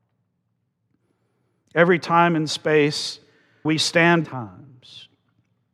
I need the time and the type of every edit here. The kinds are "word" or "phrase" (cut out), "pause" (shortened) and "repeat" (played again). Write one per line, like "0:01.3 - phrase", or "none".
0:03.6 - word
0:04.2 - word